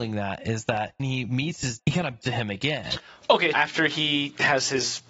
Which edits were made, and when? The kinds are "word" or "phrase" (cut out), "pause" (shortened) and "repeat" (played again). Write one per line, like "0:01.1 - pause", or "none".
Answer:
0:01.0 - word
0:01.8 - word
0:02.2 - word
0:03.5 - word